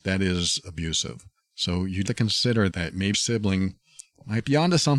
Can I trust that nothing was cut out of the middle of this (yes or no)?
no